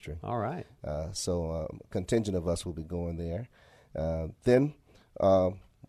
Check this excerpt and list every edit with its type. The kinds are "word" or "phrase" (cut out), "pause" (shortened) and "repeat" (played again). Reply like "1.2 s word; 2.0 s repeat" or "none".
none